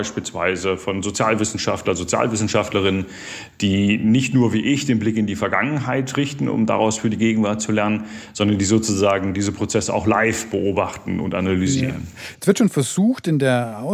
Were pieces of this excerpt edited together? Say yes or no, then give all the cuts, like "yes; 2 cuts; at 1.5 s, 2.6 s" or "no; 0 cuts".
no; 0 cuts